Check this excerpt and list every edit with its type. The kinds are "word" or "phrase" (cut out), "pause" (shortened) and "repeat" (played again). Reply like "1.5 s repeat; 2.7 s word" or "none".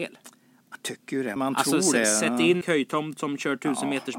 1.4 s word; 2.6 s word

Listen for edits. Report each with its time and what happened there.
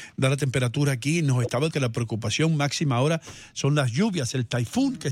1.7 s word

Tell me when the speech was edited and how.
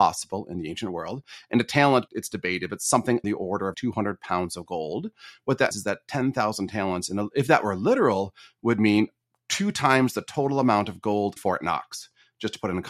2.1 s word; 3.2 s word; 3.7 s word; 5.7 s word; 11.4 s word

